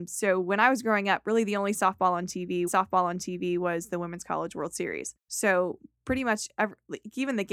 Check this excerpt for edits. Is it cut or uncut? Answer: cut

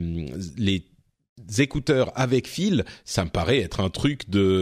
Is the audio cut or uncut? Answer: uncut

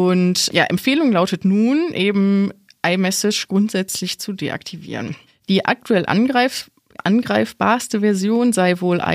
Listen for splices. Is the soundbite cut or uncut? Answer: cut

